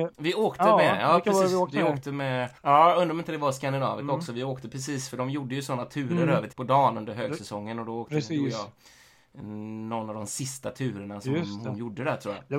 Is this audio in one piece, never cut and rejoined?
no; 2 cuts; at 2.6 s, 6.5 s

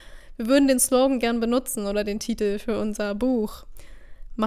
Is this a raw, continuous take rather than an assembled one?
yes; 0 cuts

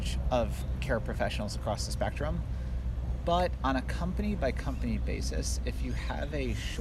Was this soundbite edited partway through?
no; 0 cuts

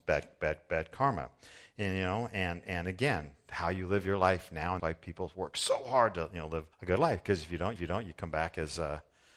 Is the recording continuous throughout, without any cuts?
no; 3 cuts; at 4.8 s, 6.7 s, 7.8 s

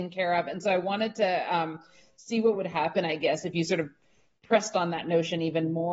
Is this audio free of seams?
yes; 0 cuts

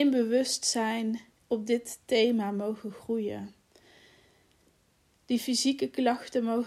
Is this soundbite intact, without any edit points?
yes; 0 cuts

